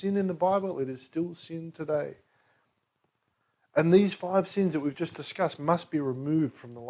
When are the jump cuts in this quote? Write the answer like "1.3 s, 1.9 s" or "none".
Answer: none